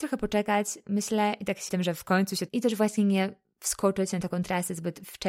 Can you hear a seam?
yes; 2 cuts; at 1.7 s, 2.5 s

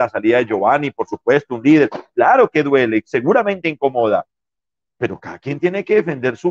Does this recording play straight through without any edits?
yes; 0 cuts

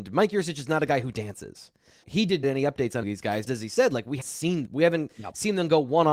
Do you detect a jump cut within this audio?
yes; 6 cuts; at 2.0 s, 2.4 s, 3.0 s, 3.5 s, 4.2 s, 4.7 s

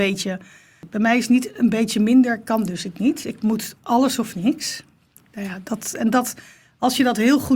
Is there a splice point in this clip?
no; 0 cuts

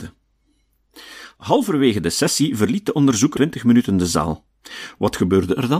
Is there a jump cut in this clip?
yes; 1 cut; at 3.3 s

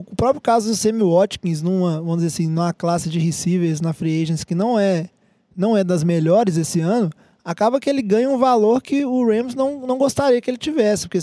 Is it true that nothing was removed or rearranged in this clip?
yes; 0 cuts

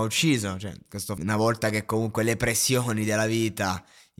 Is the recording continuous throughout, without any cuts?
no; 1 cut; at 1.2 s

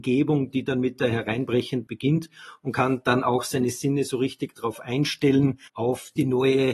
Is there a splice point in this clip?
yes; 2 cuts; at 1.9 s, 5.7 s

